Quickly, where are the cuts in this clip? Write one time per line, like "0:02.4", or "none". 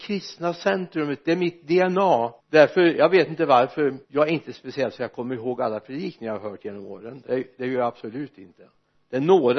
0:02.4
0:04.0